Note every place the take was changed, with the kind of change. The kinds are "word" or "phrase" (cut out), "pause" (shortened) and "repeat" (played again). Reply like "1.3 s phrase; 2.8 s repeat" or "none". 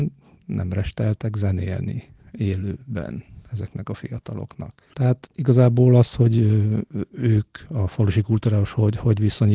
4.9 s pause